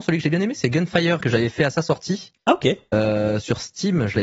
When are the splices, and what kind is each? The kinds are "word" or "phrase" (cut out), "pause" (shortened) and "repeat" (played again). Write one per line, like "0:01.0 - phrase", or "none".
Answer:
0:01.2 - word